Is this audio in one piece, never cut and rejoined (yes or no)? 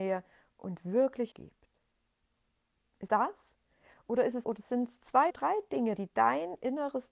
no